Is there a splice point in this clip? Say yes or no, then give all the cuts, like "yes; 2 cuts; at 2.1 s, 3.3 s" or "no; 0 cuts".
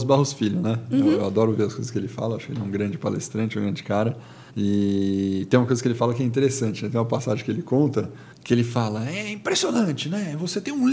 yes; 2 cuts; at 4.5 s, 8.3 s